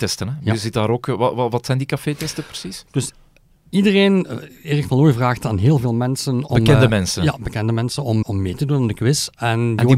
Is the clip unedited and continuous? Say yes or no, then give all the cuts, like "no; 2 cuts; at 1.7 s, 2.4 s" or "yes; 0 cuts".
no; 1 cut; at 8.2 s